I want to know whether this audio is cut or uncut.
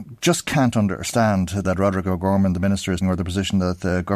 cut